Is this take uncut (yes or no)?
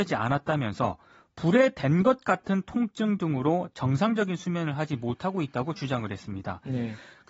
yes